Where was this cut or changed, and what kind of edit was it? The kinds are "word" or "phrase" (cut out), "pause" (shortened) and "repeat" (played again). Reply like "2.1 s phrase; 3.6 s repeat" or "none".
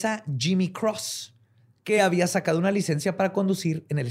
none